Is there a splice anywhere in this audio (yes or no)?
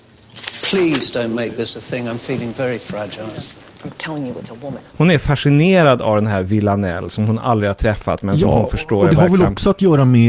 no